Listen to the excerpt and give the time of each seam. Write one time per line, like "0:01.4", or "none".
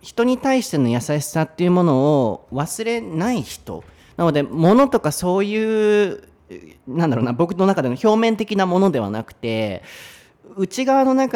none